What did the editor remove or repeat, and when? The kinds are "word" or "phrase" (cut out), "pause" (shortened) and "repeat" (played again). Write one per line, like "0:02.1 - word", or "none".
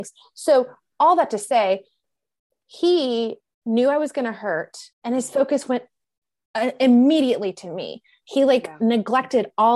0:04.9 - pause